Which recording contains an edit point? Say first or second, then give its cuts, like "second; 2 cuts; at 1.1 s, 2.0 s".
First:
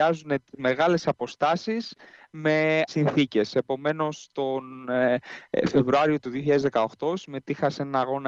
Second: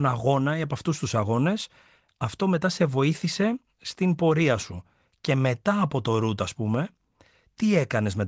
first; 1 cut; at 2.9 s